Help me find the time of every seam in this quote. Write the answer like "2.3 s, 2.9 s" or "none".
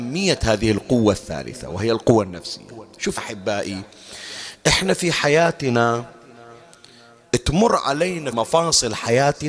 3.2 s, 8.3 s